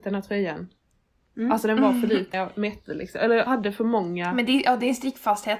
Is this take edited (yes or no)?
yes